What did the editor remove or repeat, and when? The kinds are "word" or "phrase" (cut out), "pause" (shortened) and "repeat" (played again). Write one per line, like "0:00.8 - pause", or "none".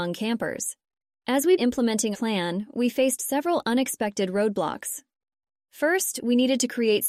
0:01.6 - word
0:02.1 - word